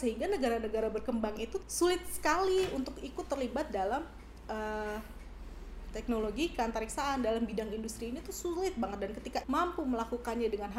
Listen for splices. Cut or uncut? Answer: cut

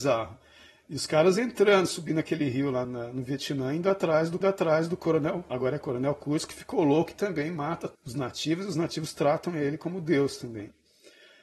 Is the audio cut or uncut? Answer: cut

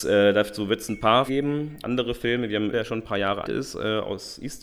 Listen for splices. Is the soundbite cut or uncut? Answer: cut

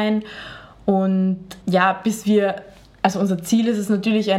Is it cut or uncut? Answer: uncut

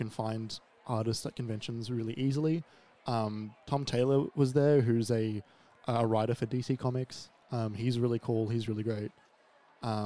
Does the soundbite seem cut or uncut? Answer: uncut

